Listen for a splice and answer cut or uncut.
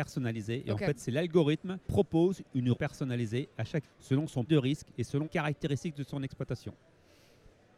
cut